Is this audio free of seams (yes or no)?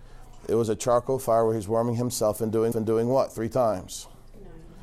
no